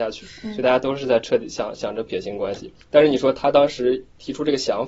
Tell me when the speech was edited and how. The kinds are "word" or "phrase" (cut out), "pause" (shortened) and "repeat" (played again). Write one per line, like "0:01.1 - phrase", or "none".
0:02.8 - pause

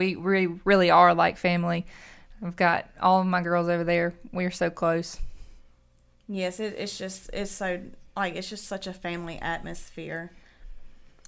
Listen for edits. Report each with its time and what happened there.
0:08.1 - pause

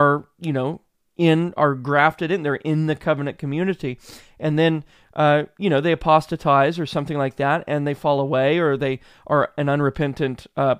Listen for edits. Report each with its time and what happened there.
none

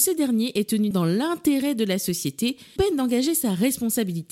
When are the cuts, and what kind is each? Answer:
0:00.9 - word
0:02.8 - word

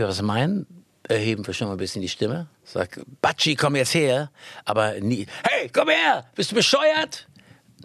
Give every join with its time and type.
0:02.5 - pause

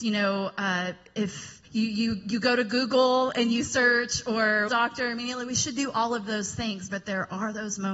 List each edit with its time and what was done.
0:01.6 - pause
0:04.7 - phrase

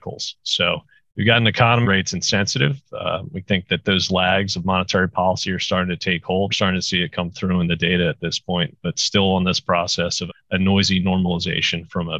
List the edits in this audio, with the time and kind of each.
0:01.0 - pause
0:01.8 - phrase
0:06.5 - phrase
0:10.3 - word

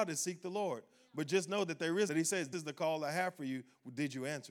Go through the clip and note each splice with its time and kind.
0:02.1 - phrase
0:02.5 - word

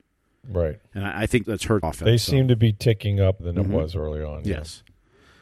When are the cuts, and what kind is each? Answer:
0:01.4 - word
0:01.8 - word
0:03.4 - word

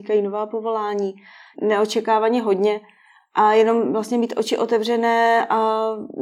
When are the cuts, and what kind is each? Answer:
0:01.5 - phrase

